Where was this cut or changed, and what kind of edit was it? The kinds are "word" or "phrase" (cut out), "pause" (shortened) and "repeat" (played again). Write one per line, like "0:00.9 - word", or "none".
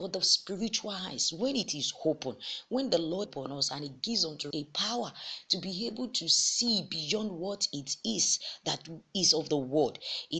0:03.3 - word
0:04.5 - word